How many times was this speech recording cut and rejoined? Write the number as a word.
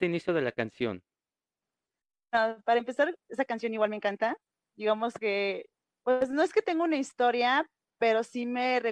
zero